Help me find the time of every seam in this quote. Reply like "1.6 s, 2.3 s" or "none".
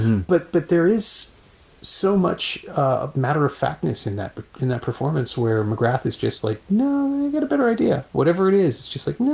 none